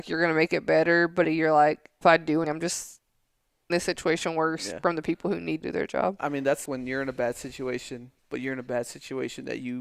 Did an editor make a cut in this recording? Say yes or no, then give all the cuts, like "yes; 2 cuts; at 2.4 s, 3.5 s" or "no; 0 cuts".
yes; 7 cuts; at 1.2 s, 2.0 s, 2.4 s, 3.7 s, 5.6 s, 6.6 s, 8.2 s